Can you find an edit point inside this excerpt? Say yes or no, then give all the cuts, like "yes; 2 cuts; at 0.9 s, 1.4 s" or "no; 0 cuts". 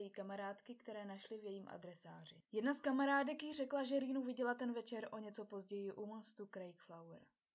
no; 0 cuts